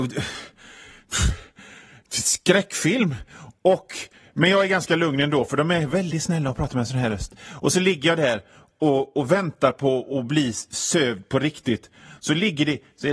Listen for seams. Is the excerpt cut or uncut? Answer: uncut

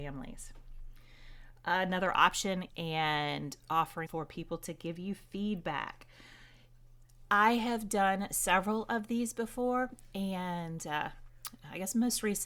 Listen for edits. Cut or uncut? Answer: cut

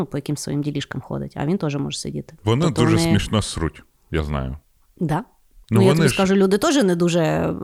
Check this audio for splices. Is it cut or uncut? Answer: cut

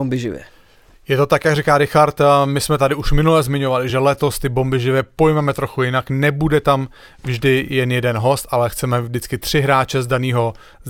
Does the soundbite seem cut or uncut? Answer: uncut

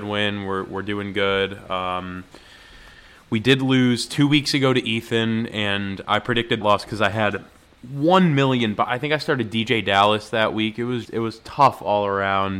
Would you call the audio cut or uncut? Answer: cut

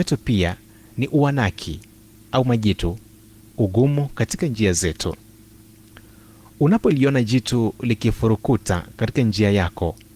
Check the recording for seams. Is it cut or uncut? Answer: uncut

